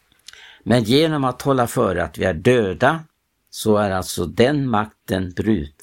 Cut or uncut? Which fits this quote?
cut